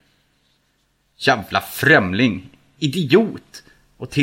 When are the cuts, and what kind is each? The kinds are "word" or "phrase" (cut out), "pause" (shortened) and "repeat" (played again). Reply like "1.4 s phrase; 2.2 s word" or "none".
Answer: none